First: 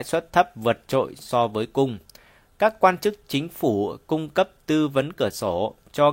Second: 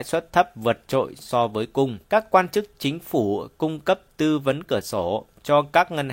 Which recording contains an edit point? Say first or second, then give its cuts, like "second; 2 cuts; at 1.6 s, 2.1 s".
second; 1 cut; at 2.0 s